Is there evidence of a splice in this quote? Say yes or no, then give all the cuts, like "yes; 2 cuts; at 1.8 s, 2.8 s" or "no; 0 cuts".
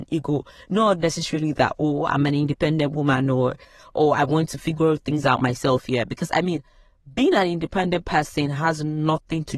no; 0 cuts